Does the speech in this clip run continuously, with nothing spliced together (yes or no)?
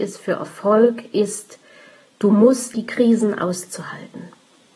no